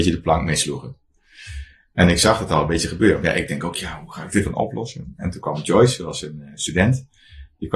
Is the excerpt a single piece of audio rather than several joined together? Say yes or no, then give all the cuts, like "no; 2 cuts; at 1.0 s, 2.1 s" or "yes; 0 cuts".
yes; 0 cuts